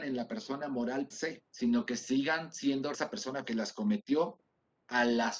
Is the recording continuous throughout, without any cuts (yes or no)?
no